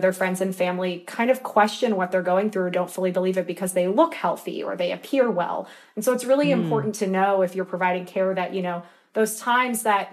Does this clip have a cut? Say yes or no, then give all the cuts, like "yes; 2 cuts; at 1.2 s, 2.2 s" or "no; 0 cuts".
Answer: no; 0 cuts